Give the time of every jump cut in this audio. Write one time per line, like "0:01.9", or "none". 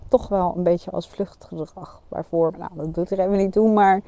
0:02.5